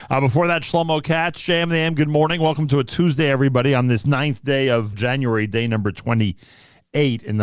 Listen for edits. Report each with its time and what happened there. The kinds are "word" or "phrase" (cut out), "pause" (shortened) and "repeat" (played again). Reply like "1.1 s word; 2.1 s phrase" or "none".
4.9 s word